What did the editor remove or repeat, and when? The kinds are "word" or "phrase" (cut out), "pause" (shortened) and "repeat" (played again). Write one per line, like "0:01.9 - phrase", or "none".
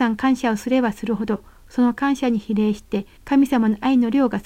0:03.2 - pause